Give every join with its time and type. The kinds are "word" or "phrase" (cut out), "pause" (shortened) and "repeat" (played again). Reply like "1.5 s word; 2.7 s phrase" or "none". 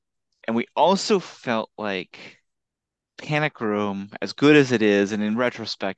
2.7 s pause